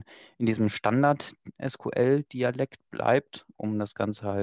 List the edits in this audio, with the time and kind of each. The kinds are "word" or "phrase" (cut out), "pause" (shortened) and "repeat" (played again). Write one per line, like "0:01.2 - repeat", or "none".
none

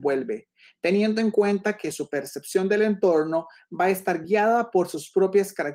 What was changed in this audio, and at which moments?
none

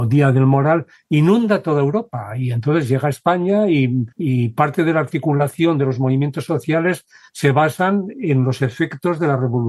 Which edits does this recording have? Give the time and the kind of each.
0:04.1 - pause

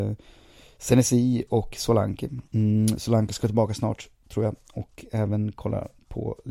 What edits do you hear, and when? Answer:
0:02.5 - pause

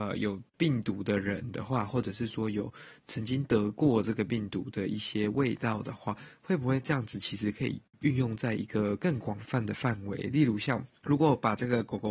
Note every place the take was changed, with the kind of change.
0:10.9 - pause

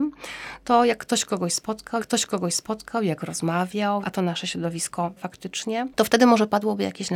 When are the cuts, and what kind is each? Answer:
0:02.0 - repeat
0:04.0 - phrase
0:05.2 - word

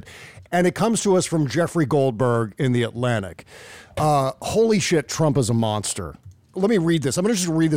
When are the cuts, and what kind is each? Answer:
none

